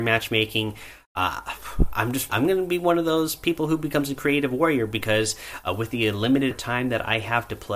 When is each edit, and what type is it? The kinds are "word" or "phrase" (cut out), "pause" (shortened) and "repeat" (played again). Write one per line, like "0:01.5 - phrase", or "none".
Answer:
0:02.3 - word
0:06.5 - word

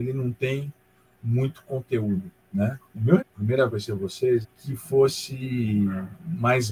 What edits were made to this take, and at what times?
0:03.2 - word
0:03.7 - phrase
0:04.4 - phrase

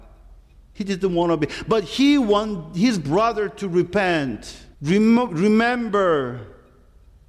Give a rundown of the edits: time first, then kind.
0:04.7 - pause

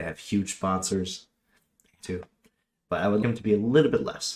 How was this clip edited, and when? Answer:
0:02.0 - word
0:03.2 - word

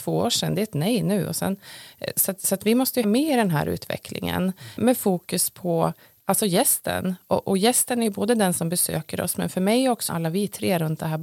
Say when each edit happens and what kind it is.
0:03.0 - word
0:04.8 - word
0:10.1 - word

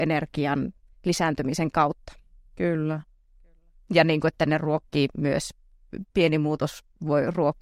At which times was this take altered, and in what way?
0:00.9 - pause
0:06.1 - pause

